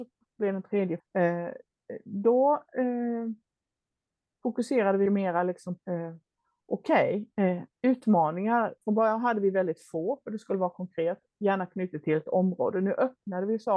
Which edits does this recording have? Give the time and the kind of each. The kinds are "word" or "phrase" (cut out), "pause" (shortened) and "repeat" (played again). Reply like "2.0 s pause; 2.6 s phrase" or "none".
1.0 s word; 5.1 s word; 5.8 s word